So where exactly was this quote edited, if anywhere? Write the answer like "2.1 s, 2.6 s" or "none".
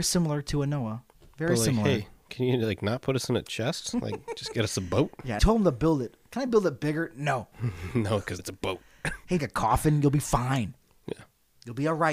2.2 s, 5.4 s, 7.5 s, 8.4 s, 9.4 s